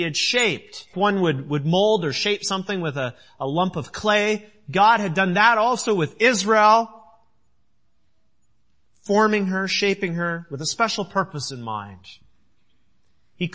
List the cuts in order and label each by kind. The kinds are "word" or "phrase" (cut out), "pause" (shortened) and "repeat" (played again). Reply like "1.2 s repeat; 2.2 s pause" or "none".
0.9 s word